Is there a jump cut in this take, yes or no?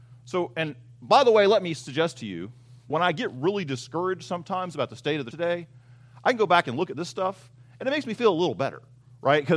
yes